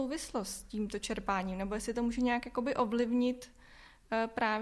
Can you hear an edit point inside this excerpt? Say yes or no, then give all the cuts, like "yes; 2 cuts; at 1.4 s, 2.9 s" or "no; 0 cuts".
no; 0 cuts